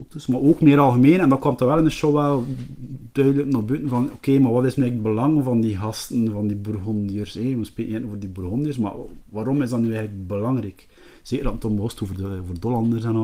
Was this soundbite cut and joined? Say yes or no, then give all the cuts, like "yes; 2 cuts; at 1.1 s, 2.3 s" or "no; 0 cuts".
no; 0 cuts